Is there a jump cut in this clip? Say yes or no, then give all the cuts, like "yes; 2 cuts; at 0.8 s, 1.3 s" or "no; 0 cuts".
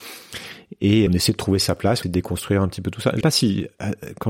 yes; 3 cuts; at 1.1 s, 2.0 s, 3.2 s